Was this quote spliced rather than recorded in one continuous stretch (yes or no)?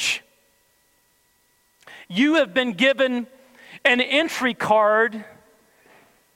no